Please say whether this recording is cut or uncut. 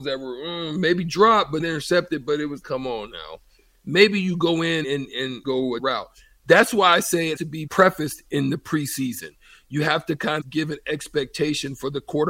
cut